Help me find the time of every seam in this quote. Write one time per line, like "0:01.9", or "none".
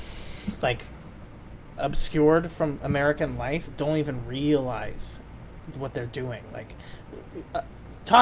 0:01.8
0:03.7
0:05.7